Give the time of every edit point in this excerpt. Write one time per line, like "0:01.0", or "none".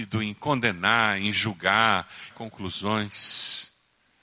0:02.3